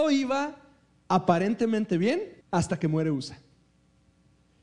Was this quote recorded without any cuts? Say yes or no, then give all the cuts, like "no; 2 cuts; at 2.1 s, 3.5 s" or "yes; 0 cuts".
no; 1 cut; at 2.4 s